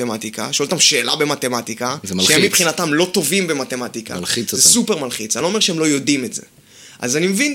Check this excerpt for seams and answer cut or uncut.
uncut